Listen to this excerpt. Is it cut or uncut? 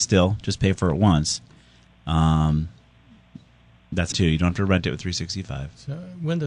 cut